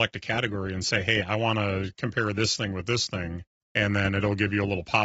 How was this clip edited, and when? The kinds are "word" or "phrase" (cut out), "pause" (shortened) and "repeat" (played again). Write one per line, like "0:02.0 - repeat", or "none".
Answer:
0:03.5 - pause